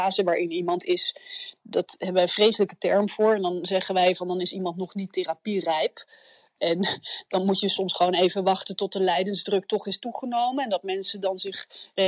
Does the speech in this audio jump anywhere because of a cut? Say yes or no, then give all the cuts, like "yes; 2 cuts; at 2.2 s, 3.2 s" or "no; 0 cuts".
no; 0 cuts